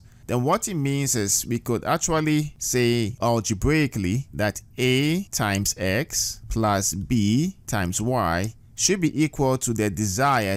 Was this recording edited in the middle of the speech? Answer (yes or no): no